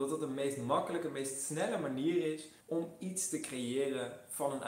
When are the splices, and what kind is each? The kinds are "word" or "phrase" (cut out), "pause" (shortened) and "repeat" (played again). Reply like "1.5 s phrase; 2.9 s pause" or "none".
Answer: 2.6 s pause